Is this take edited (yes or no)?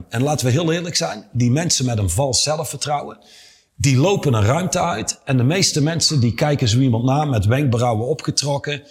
no